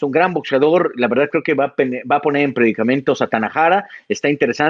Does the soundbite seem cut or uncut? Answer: uncut